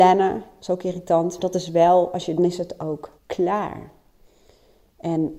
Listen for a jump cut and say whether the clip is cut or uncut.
cut